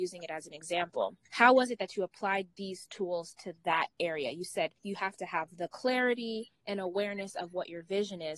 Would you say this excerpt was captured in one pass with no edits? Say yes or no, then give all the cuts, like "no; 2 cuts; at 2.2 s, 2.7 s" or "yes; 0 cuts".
no; 2 cuts; at 1.2 s, 4.8 s